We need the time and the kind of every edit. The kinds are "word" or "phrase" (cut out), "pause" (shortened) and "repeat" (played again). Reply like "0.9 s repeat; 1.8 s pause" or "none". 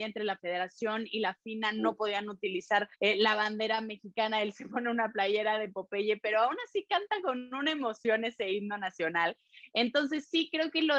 3.0 s pause